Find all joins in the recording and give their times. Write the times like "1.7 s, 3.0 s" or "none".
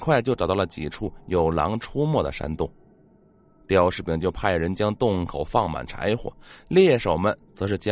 none

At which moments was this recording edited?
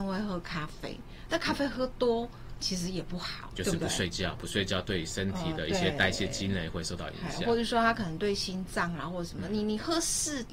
3.5 s

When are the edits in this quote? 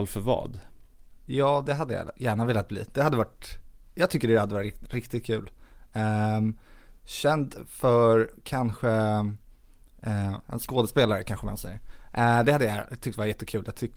10.4 s

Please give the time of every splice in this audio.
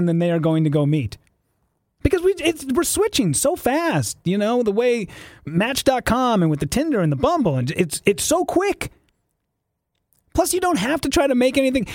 none

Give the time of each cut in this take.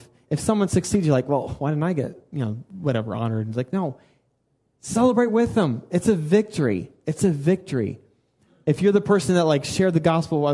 none

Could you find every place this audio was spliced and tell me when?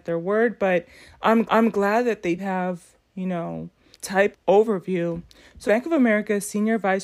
1.4 s, 2.4 s, 3.9 s, 4.3 s, 5.6 s

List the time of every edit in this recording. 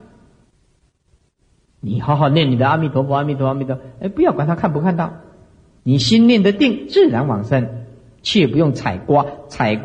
none

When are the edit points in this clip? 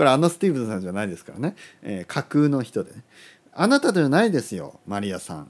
none

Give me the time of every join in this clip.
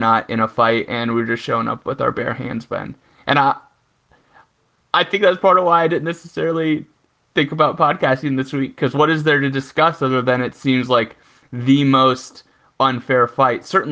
none

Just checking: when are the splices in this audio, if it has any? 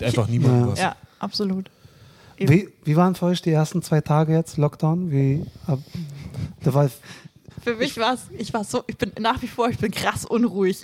none

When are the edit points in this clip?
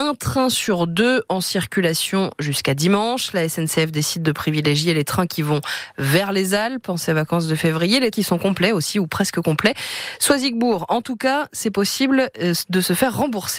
8.1 s

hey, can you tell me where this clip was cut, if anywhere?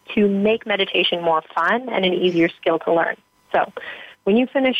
none

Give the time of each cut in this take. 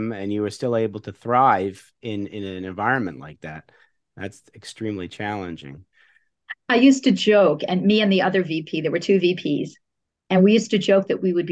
none

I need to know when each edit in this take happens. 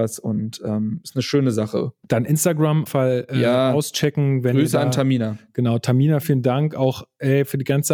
2.0 s, 2.9 s, 6.2 s

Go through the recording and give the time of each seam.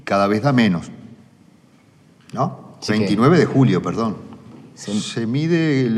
2.9 s

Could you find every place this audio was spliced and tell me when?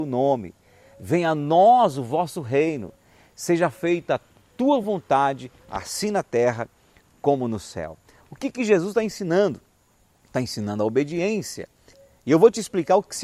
none

